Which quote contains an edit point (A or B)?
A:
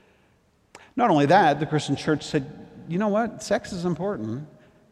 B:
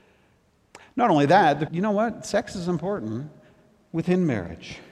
B